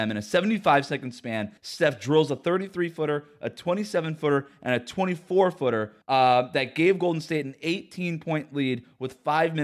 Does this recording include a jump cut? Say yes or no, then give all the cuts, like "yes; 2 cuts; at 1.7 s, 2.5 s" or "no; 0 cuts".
yes; 2 cuts; at 1.6 s, 6.0 s